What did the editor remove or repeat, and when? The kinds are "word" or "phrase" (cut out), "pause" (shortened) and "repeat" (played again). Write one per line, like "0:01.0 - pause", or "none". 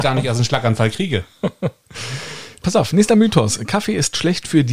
0:02.6 - word